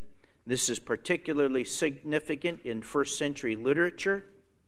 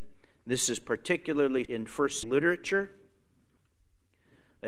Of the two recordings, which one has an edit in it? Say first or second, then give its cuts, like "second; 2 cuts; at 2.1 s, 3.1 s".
second; 2 cuts; at 1.6 s, 2.2 s